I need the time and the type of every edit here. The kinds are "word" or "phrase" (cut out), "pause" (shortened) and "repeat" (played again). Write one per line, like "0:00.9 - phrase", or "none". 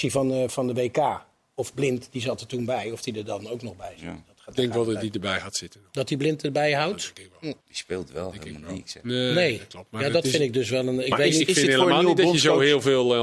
0:07.6 - pause